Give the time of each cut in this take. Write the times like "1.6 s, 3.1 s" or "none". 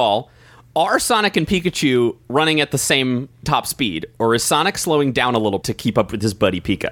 5.6 s